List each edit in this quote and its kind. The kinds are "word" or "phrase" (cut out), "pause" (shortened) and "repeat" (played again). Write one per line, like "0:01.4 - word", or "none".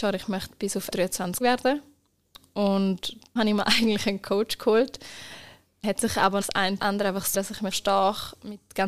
0:00.9 - word
0:01.4 - word
0:03.4 - word
0:05.8 - word
0:06.4 - word
0:06.8 - word
0:07.3 - word
0:07.7 - word